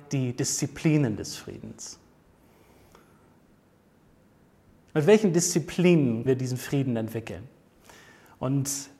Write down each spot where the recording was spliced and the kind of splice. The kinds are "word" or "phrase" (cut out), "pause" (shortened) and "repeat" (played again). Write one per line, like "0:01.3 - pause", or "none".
0:06.3 - word